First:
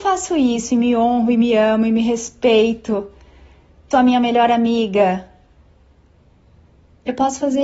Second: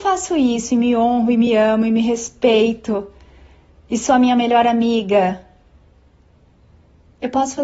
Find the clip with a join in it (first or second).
first